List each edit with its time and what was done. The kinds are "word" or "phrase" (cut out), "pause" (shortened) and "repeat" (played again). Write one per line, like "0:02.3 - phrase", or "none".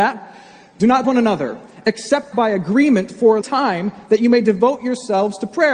0:01.0 - word
0:02.3 - word
0:03.4 - word

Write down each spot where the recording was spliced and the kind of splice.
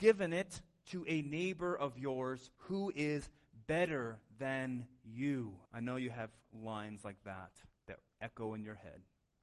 0:02.6 - pause
0:05.7 - pause
0:07.8 - pause

